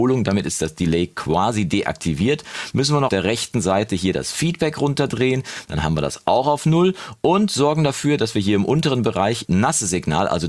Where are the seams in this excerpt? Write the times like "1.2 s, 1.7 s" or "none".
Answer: 3.1 s, 9.4 s